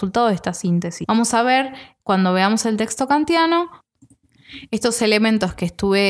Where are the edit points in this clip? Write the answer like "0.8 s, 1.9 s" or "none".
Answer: none

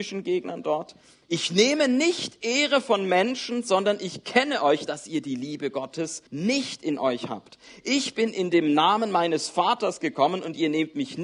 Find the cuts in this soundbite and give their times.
6.3 s

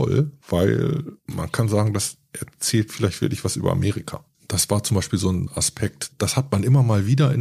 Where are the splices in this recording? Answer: none

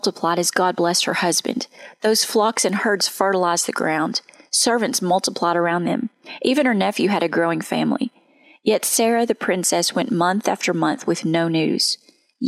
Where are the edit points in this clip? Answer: none

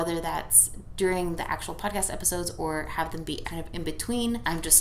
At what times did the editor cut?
3.4 s

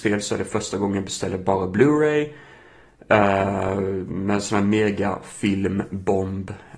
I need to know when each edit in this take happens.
none

